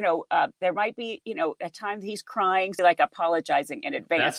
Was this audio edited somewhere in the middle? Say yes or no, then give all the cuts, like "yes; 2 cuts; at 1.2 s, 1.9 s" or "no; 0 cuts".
yes; 1 cut; at 2.8 s